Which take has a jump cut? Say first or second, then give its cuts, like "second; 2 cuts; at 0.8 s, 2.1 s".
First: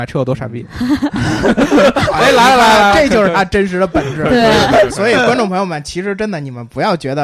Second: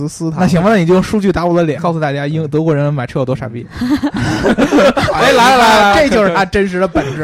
second; 1 cut; at 1.8 s